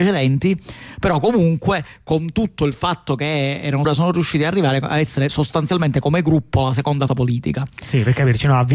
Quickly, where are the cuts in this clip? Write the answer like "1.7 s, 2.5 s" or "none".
3.8 s, 7.1 s